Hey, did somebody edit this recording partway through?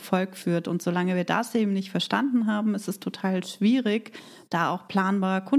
no; 0 cuts

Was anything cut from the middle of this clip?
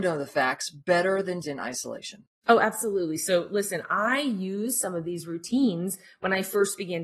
yes; 1 cut; at 1.4 s

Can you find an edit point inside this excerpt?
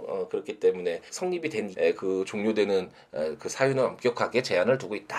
yes; 2 cuts; at 1.1 s, 1.7 s

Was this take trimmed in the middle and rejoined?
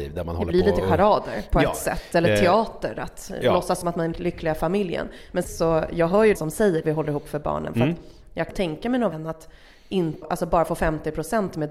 yes; 8 cuts; at 3.8 s, 4.1 s, 5.4 s, 6.3 s, 6.8 s, 8.5 s, 9.1 s, 10.2 s

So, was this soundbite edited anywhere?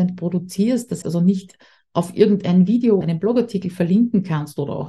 yes; 2 cuts; at 1.0 s, 3.0 s

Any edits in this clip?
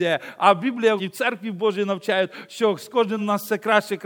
yes; 2 cuts; at 1.0 s, 3.2 s

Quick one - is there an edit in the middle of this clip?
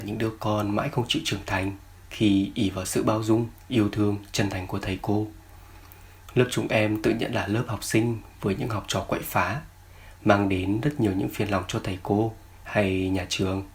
no; 0 cuts

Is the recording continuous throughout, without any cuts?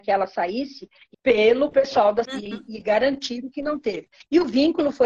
no; 2 cuts; at 1.1 s, 2.3 s

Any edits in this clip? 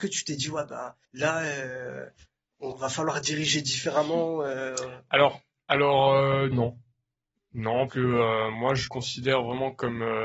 yes; 5 cuts; at 1.0 s, 2.7 s, 6.5 s, 7.9 s, 8.9 s

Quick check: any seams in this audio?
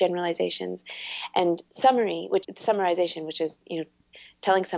yes; 1 cut; at 2.4 s

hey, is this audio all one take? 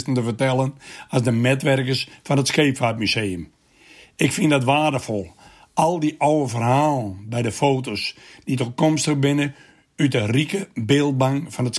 yes; 0 cuts

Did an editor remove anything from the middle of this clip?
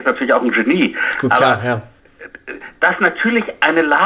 no; 0 cuts

